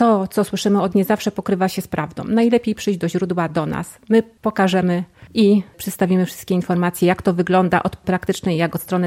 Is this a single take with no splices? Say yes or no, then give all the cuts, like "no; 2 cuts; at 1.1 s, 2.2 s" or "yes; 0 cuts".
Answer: no; 2 cuts; at 0.9 s, 8.0 s